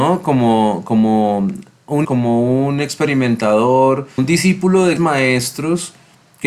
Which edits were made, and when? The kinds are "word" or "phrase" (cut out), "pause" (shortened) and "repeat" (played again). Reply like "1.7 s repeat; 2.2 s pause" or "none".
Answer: 2.0 s word; 4.2 s word; 5.0 s word